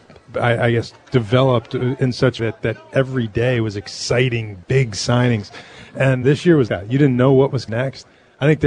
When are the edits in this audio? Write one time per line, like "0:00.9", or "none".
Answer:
0:02.4
0:06.2
0:06.7
0:07.7